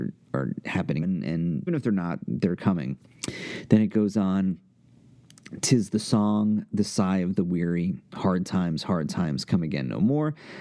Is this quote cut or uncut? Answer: cut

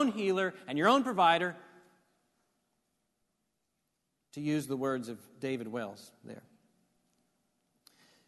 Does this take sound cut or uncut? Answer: uncut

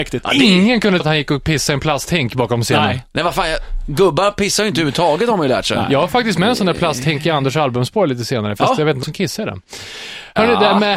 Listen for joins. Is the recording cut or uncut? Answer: cut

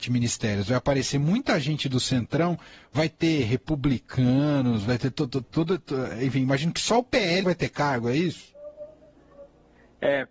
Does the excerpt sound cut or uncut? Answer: cut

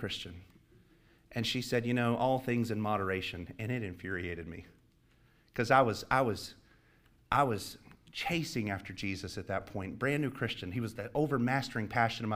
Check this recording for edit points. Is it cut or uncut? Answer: uncut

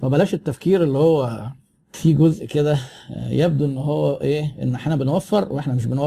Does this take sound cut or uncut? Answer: uncut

